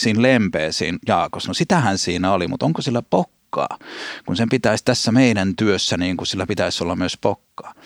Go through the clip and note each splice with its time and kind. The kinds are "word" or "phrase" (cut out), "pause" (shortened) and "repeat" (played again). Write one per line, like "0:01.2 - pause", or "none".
none